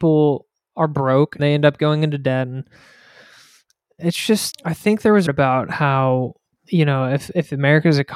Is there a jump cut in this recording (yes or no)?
yes